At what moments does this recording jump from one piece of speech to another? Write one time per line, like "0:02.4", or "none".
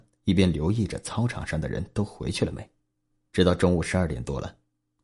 0:02.9

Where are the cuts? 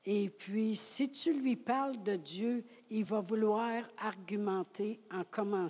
none

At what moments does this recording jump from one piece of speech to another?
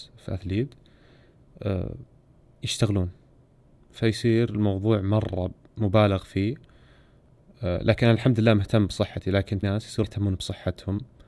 0:09.6
0:10.0

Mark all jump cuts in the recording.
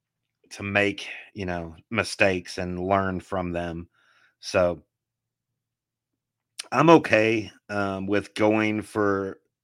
none

